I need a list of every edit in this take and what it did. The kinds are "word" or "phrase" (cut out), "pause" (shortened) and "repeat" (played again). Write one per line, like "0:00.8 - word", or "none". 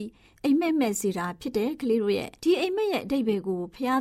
0:02.4 - pause

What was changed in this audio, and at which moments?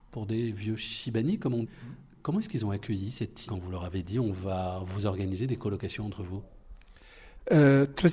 0:01.6 - word
0:03.5 - word

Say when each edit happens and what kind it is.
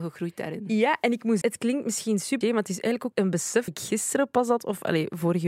0:01.4 - word
0:02.4 - word
0:03.1 - word
0:03.7 - word

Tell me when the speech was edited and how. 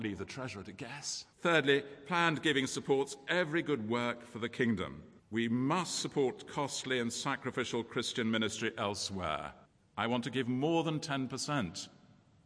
0:01.3 - pause
0:05.2 - pause
0:09.6 - pause

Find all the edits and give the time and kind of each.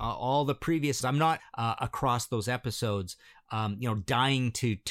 0:01.0 - word
0:01.4 - phrase

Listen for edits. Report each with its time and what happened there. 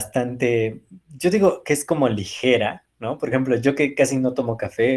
0:03.3 - word

